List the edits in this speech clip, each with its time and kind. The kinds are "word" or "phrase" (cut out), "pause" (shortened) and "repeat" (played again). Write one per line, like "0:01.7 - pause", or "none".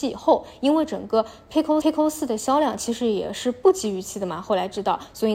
0:01.8 - repeat